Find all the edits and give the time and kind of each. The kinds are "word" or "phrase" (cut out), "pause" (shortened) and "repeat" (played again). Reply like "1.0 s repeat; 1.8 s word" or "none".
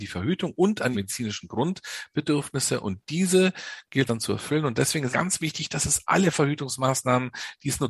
0.9 s word; 4.1 s word; 5.1 s word